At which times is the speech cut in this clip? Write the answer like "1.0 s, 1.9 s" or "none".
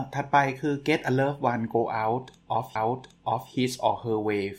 2.8 s